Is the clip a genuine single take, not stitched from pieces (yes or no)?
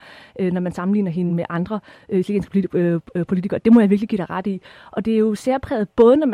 yes